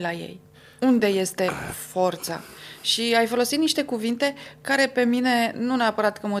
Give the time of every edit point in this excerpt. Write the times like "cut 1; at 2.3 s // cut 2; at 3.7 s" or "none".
none

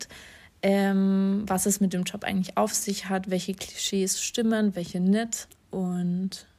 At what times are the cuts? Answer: none

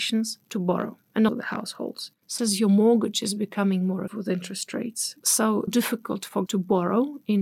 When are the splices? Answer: cut 1; at 1.3 s // cut 2; at 2.4 s // cut 3; at 4.1 s // cut 4; at 5.7 s // cut 5; at 6.5 s

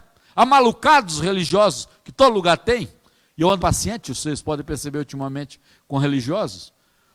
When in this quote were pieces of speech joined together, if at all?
cut 1; at 3.6 s

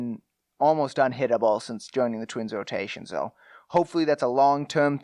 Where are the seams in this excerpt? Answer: none

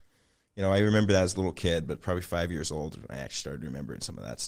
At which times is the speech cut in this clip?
none

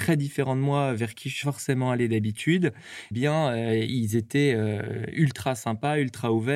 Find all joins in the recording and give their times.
cut 1; at 1.4 s // cut 2; at 3.1 s

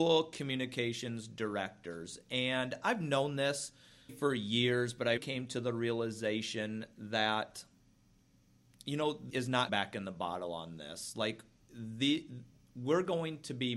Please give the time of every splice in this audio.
cut 1; at 4.1 s // cut 2; at 5.2 s // cut 3; at 9.3 s // cut 4; at 9.7 s

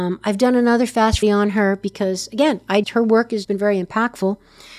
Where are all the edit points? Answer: cut 1; at 1.2 s // cut 2; at 2.8 s // cut 3; at 3.4 s

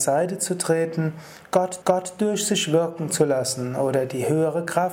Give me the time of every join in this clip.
cut 1; at 1.8 s

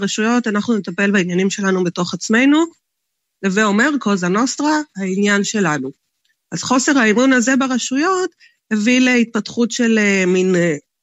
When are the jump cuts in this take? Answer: none

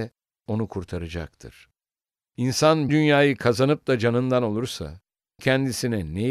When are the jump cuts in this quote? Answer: cut 1; at 2.9 s // cut 2; at 5.4 s

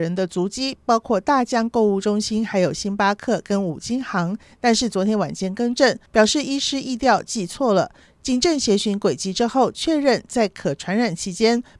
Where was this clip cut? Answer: cut 1; at 6.1 s

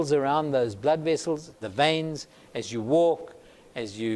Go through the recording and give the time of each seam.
cut 1; at 1.6 s

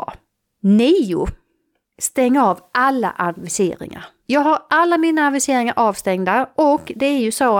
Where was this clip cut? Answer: none

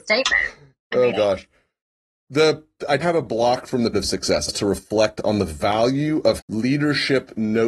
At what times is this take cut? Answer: cut 1; at 1.1 s // cut 2; at 3.0 s // cut 3; at 3.9 s // cut 4; at 4.5 s // cut 5; at 6.4 s

